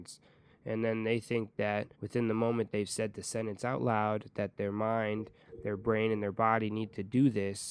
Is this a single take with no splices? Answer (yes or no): no